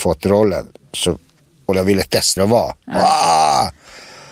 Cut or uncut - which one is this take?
cut